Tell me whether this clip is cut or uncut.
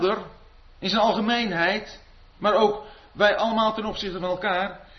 uncut